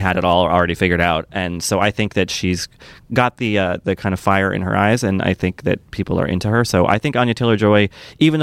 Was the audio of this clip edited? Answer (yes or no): no